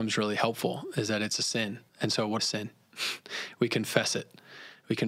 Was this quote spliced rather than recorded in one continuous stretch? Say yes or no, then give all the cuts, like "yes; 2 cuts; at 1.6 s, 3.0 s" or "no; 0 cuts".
yes; 2 cuts; at 1.9 s, 2.4 s